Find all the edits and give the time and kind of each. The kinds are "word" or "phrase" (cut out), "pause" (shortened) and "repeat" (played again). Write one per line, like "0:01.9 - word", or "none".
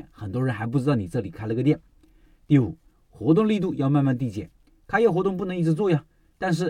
none